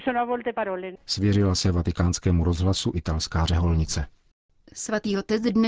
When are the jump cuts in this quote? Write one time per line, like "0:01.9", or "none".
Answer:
none